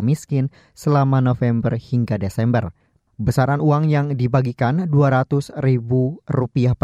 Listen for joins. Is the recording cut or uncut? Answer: uncut